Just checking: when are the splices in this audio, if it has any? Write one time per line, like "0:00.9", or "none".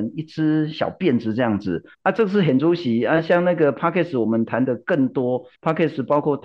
0:01.9
0:05.5